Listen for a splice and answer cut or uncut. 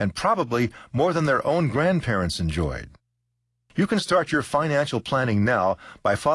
uncut